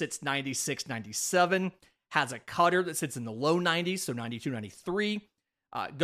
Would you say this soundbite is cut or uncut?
uncut